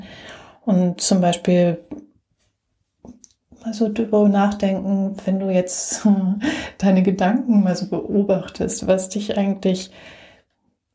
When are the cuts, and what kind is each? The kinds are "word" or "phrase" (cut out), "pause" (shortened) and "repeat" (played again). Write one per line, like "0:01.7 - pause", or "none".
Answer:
none